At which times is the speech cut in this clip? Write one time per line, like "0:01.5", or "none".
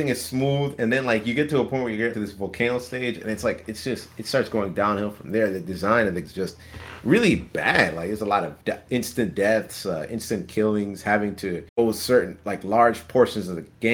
0:02.1
0:06.2
0:08.6
0:11.7